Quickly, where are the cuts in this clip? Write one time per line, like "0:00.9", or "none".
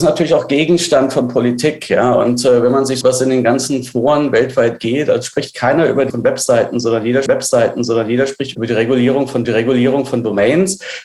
0:03.0
0:06.1
0:07.3
0:09.4